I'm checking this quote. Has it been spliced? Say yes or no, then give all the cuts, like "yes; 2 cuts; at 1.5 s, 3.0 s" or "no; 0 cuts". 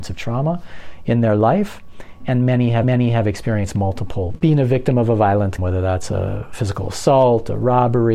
yes; 3 cuts; at 2.2 s, 2.8 s, 5.6 s